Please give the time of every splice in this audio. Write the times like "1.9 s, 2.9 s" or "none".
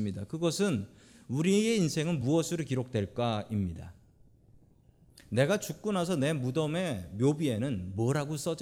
none

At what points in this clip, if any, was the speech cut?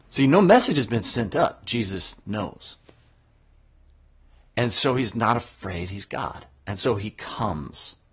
2.2 s

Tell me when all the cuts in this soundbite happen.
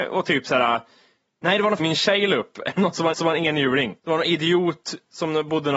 1.8 s, 3.1 s, 4.0 s

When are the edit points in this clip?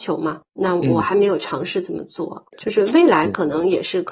2.5 s

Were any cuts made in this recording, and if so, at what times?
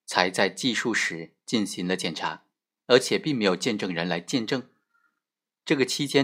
none

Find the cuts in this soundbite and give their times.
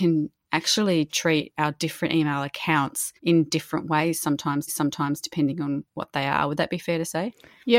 3.2 s, 4.7 s

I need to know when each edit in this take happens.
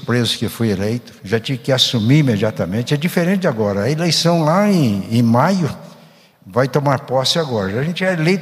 none

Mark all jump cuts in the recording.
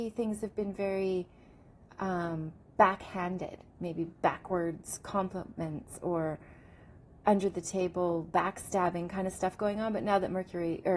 none

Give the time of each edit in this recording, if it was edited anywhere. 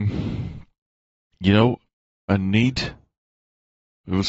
none

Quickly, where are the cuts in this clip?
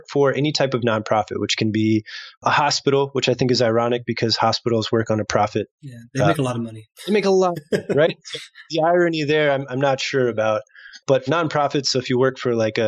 6.9 s, 11.3 s

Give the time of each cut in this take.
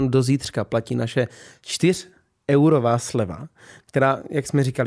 none

